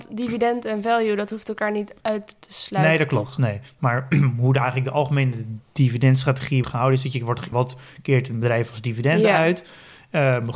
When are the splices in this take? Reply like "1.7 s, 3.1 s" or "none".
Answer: 6.6 s, 7.5 s